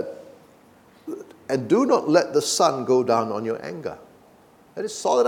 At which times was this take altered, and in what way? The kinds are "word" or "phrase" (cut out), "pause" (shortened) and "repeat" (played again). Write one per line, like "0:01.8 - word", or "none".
none